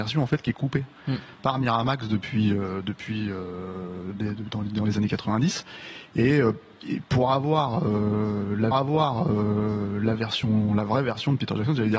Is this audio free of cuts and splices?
no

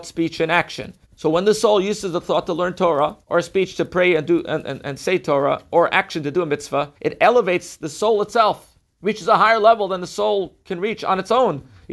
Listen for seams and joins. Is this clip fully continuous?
no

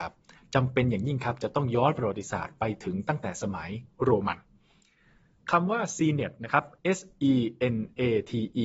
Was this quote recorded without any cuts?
yes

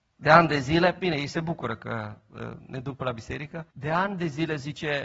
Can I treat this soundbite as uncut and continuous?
no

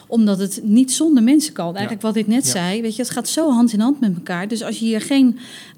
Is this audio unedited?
yes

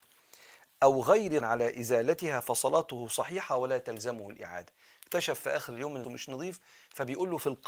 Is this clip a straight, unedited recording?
no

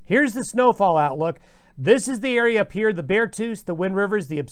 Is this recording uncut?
yes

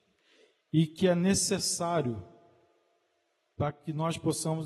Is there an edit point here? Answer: no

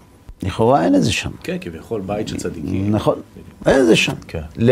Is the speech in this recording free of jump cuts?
yes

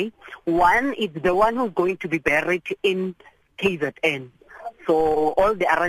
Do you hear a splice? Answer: no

